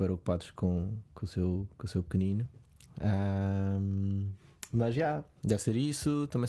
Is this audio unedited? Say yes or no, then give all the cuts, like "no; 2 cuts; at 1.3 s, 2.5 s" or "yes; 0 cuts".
yes; 0 cuts